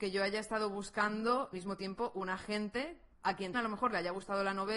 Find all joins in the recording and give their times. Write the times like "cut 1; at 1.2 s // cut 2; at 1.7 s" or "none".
cut 1; at 1.5 s // cut 2; at 3.1 s // cut 3; at 3.5 s